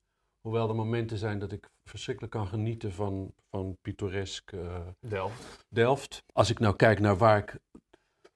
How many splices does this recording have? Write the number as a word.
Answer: one